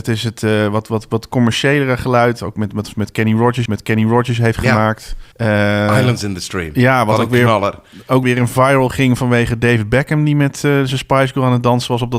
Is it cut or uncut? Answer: cut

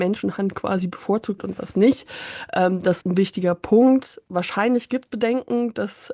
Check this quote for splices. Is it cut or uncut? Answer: cut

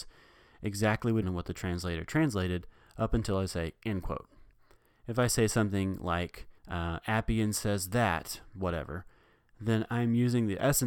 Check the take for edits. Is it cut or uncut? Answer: cut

